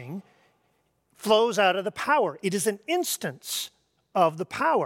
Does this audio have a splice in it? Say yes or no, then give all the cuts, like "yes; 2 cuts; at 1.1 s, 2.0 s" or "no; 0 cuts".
no; 0 cuts